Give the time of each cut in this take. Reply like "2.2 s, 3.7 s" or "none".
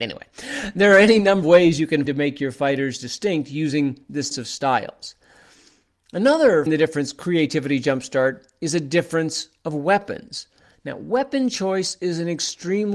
1.4 s, 2.1 s, 4.3 s, 6.7 s

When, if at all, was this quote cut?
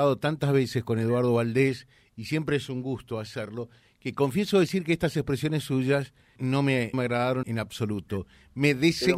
6.4 s, 6.9 s, 7.4 s

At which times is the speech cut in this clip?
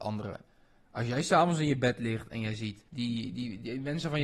2.9 s

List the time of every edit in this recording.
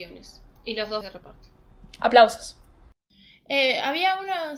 1.0 s

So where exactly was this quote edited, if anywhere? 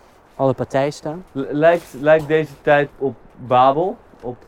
1.3 s, 2.9 s

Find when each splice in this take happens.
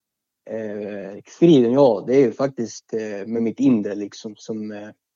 none

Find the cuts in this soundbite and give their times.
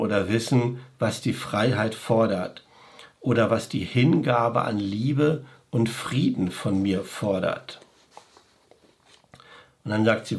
none

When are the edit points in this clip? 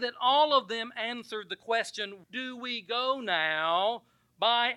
2.2 s

